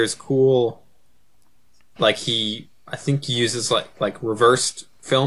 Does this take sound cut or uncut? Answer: uncut